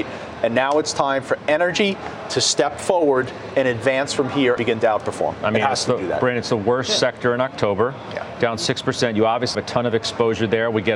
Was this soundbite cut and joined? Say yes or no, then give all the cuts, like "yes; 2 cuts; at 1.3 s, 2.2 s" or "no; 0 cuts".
yes; 2 cuts; at 4.6 s, 9.5 s